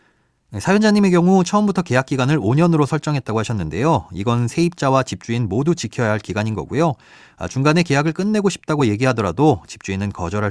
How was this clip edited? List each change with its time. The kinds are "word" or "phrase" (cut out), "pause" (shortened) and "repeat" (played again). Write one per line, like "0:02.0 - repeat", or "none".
none